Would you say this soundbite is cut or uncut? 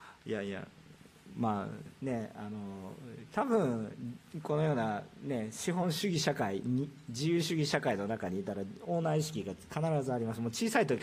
uncut